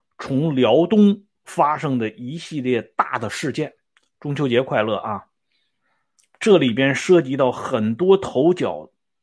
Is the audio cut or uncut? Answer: cut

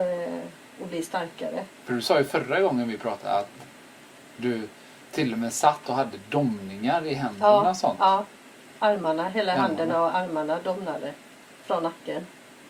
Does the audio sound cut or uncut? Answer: uncut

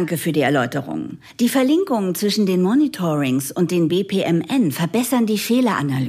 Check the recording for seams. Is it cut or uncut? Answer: uncut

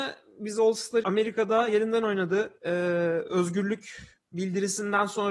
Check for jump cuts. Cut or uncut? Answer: cut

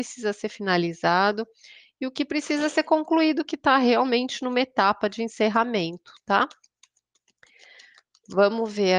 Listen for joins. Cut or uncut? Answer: uncut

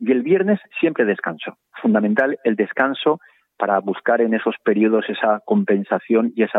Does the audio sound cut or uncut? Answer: uncut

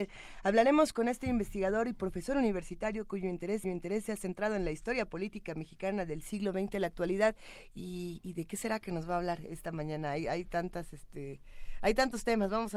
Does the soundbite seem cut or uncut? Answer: cut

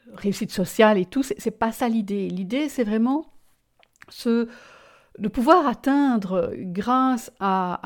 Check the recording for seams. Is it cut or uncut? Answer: uncut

